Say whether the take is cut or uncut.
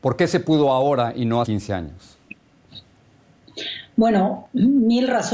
cut